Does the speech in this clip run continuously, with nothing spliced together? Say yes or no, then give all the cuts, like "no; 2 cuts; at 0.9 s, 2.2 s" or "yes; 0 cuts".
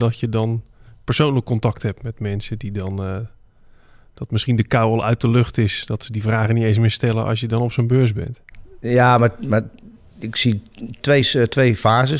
yes; 0 cuts